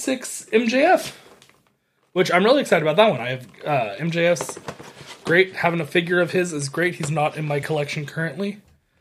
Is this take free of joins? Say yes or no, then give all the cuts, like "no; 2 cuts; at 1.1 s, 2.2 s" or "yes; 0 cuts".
yes; 0 cuts